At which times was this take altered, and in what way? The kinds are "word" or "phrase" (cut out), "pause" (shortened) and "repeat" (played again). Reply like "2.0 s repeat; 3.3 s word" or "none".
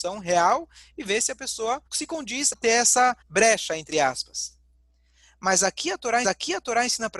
1.9 s pause; 2.5 s word; 3.2 s pause; 6.2 s repeat

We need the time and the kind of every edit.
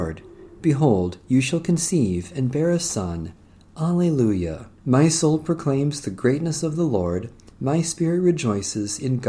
4.8 s pause

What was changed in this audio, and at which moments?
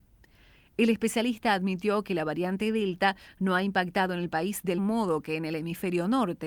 4.8 s word

